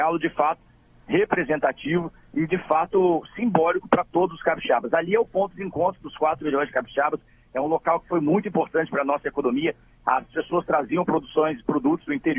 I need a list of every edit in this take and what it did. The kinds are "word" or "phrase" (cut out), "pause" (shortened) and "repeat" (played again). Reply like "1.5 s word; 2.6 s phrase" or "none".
none